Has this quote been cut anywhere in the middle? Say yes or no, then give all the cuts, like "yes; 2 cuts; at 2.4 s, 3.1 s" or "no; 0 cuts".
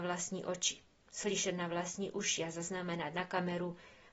no; 0 cuts